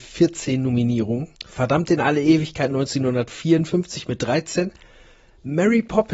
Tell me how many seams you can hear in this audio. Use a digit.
1